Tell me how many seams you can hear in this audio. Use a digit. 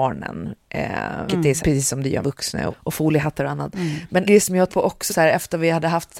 7